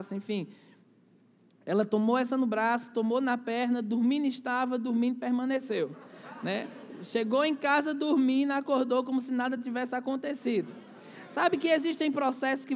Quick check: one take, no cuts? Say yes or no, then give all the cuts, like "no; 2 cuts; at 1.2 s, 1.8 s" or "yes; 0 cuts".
yes; 0 cuts